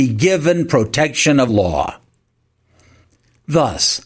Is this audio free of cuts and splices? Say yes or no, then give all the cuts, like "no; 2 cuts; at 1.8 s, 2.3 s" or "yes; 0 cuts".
no; 1 cut; at 1.5 s